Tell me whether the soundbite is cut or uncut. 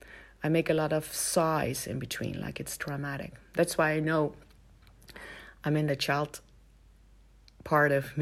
uncut